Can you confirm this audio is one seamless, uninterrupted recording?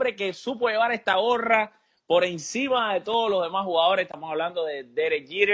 yes; 0 cuts

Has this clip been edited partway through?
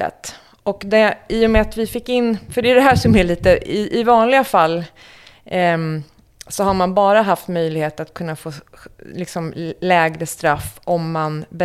no; 0 cuts

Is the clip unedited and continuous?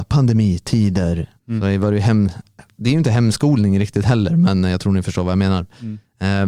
no; 1 cut; at 1.4 s

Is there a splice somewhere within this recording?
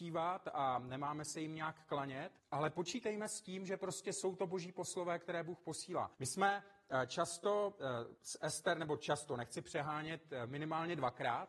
yes; 3 cuts; at 2.4 s, 6.1 s, 8.2 s

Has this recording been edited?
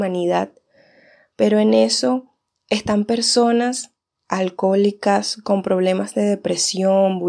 no; 0 cuts

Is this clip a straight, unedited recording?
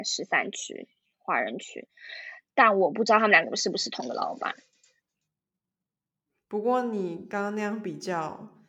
yes; 0 cuts

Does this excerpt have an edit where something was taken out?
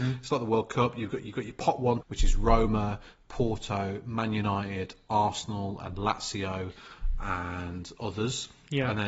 yes; 1 cut; at 2.0 s

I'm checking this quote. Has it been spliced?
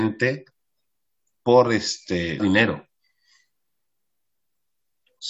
yes; 1 cut; at 2.4 s

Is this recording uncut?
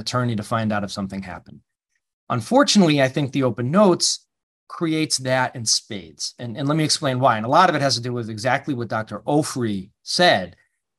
yes; 0 cuts

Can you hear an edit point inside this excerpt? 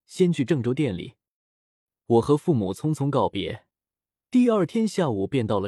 no; 0 cuts

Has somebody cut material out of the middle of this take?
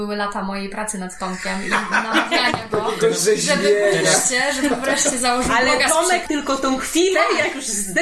yes; 1 cut; at 6.2 s

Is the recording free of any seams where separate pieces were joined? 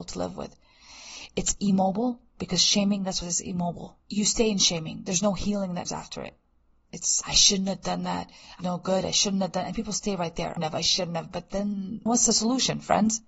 no; 7 cuts; at 3.2 s, 4.0 s, 5.9 s, 7.2 s, 8.6 s, 10.6 s, 12.1 s

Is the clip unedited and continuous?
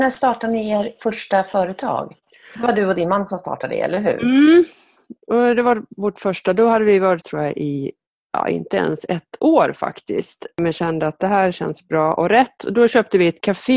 no; 2 cuts; at 1.0 s, 7.2 s

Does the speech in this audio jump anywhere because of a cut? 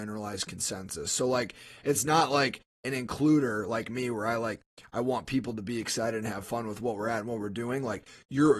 no; 0 cuts

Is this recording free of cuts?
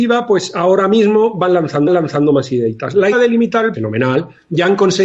no; 3 cuts; at 1.9 s, 3.1 s, 3.7 s

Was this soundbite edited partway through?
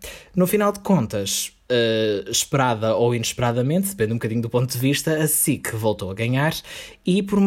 no; 0 cuts

